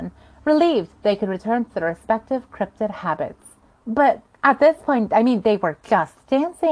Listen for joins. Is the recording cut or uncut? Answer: cut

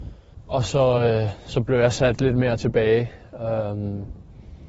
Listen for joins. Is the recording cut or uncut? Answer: uncut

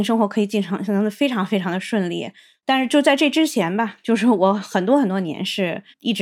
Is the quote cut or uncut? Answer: uncut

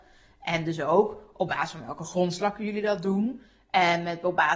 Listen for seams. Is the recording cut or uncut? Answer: uncut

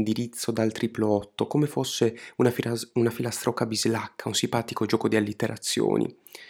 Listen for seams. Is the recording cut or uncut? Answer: uncut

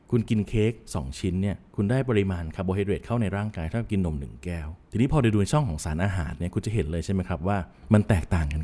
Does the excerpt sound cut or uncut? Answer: cut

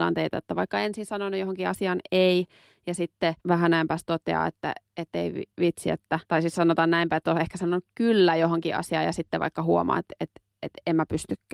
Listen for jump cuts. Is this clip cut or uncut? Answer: cut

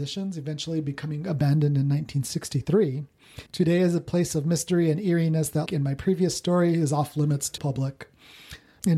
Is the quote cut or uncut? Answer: cut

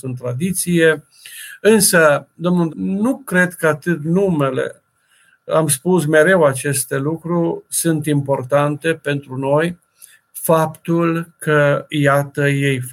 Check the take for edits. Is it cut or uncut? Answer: cut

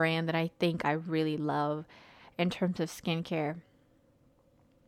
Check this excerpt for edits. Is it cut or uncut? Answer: uncut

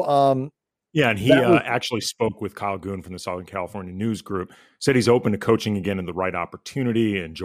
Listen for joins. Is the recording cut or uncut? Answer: uncut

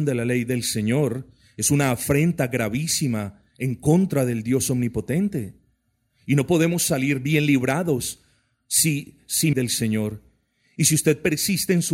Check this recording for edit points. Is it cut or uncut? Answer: cut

